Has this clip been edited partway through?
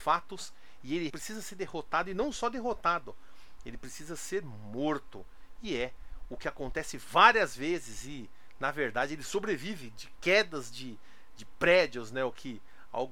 yes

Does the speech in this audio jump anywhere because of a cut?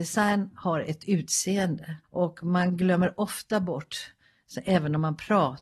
yes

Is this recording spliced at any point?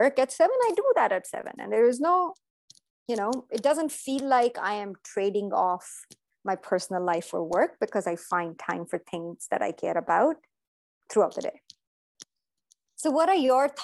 no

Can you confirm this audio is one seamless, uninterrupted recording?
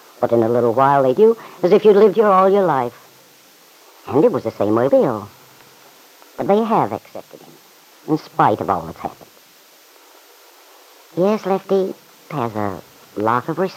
no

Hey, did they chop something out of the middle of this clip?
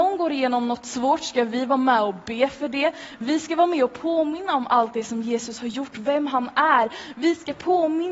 no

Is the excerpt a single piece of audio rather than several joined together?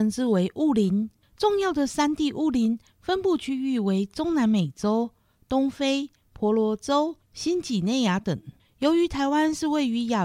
yes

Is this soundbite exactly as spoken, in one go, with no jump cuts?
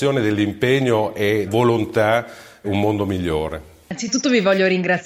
no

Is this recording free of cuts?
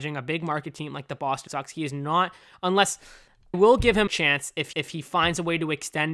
no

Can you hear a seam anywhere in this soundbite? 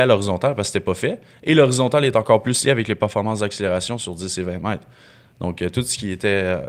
no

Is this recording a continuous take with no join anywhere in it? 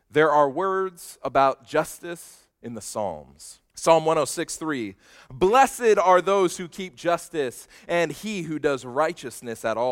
no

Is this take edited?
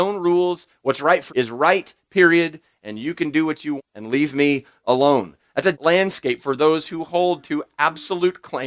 yes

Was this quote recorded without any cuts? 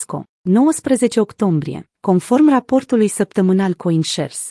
no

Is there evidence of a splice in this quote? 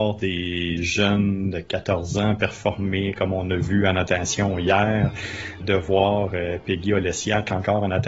yes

